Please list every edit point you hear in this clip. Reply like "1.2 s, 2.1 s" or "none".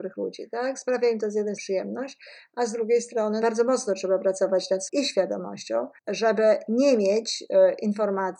1.6 s, 3.4 s, 4.9 s, 6.0 s

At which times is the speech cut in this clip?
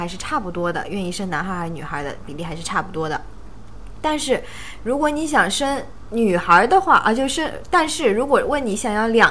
none

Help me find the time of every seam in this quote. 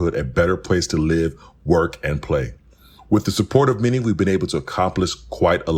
none

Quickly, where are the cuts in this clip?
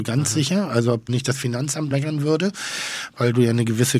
1.1 s, 1.9 s

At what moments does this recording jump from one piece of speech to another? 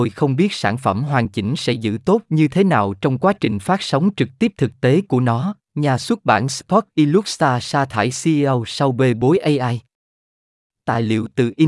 5.6 s

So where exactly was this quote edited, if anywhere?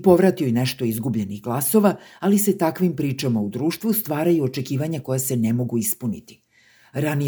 none

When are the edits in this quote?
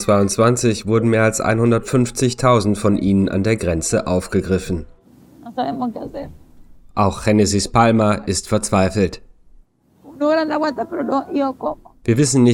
none

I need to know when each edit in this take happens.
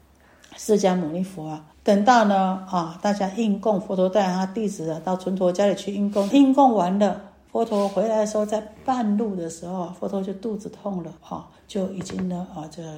1.7 s, 6.3 s, 11.2 s, 11.6 s

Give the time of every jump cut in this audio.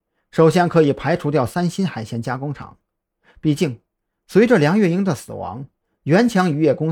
none

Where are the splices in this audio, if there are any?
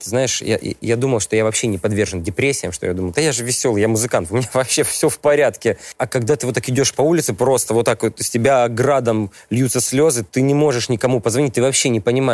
none

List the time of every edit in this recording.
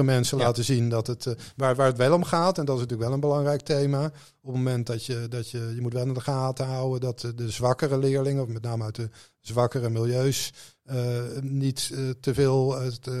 none

